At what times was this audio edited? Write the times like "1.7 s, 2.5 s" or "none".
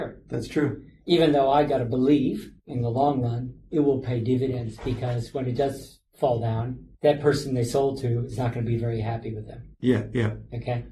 none